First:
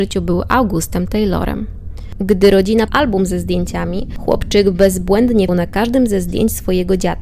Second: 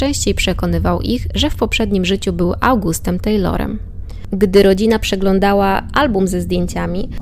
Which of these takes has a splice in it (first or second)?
first